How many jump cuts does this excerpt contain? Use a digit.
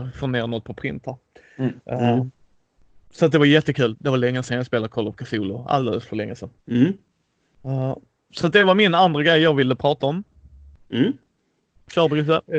1